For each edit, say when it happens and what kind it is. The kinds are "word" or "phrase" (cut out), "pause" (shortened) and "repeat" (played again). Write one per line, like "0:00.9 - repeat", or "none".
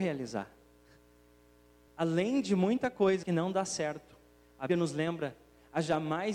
0:03.2 - phrase
0:04.7 - word